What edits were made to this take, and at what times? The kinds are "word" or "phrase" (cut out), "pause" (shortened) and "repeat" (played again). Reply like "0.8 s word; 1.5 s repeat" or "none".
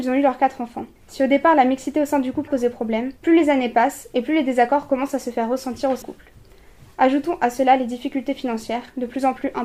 1.0 s pause; 2.5 s phrase; 3.2 s pause; 6.0 s word

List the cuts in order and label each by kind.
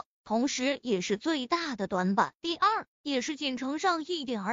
2.4 s pause

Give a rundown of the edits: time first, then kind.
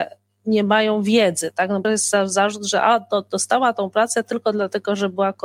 1.8 s word

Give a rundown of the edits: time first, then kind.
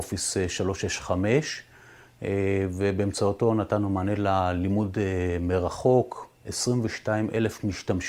6.3 s pause

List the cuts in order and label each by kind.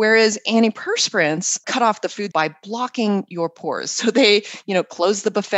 1.6 s word; 2.3 s word

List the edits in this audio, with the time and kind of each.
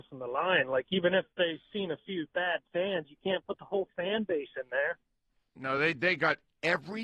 none

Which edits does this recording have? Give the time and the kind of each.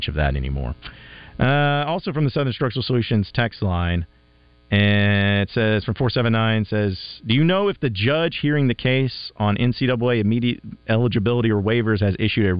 none

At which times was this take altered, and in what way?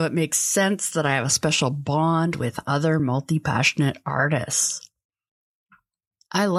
none

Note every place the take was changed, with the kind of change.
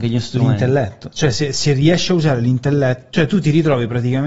none

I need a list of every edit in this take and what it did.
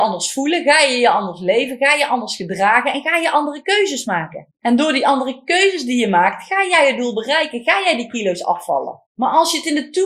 4.5 s pause; 9.0 s pause

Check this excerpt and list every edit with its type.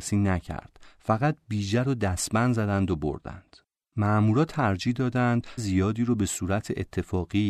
5.6 s word

